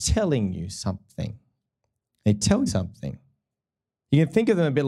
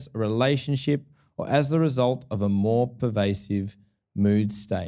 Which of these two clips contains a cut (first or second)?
first